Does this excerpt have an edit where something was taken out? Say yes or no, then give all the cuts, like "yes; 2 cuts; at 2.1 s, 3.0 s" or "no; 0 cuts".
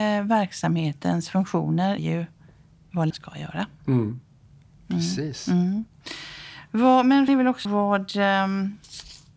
yes; 4 cuts; at 2.0 s, 3.1 s, 7.3 s, 7.7 s